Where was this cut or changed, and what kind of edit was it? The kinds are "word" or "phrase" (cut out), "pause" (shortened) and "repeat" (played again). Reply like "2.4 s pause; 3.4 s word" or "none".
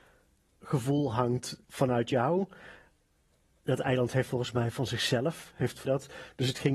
1.7 s pause; 4.3 s word; 5.8 s word